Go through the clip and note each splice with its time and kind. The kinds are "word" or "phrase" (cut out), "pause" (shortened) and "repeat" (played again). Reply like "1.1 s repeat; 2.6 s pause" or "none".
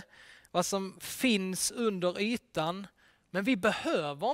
none